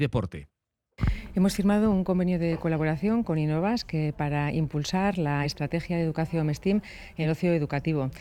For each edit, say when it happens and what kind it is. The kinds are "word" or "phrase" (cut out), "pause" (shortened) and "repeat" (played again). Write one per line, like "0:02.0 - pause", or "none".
none